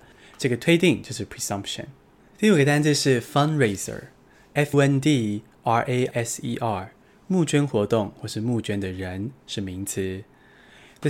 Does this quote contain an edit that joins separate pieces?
yes; 3 cuts; at 4.7 s, 6.1 s, 7.1 s

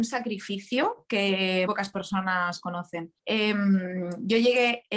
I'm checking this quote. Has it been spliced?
yes; 2 cuts; at 1.7 s, 3.2 s

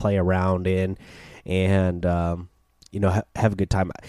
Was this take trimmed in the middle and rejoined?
no; 0 cuts

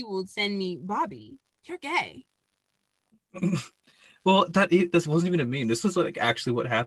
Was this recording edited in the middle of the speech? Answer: no; 0 cuts

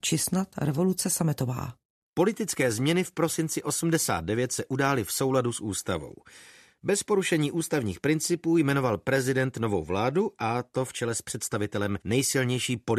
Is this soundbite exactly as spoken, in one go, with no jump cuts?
yes; 0 cuts

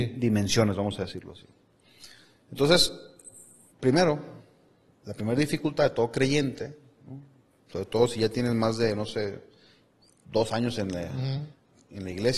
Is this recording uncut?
yes; 0 cuts

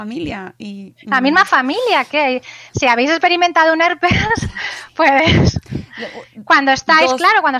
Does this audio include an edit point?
no; 0 cuts

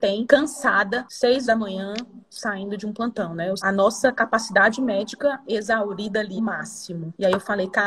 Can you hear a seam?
yes; 3 cuts; at 1.5 s, 3.6 s, 6.4 s

